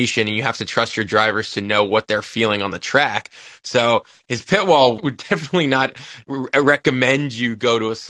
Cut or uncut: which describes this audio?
cut